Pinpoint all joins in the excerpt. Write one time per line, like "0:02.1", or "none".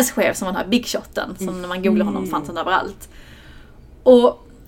0:02.3